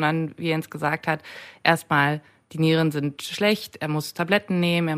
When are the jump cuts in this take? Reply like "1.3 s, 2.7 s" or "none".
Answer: none